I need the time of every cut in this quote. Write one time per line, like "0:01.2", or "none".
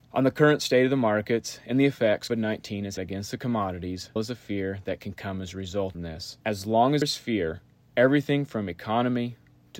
0:02.3
0:03.0
0:04.2
0:05.9
0:06.4
0:07.0
0:07.7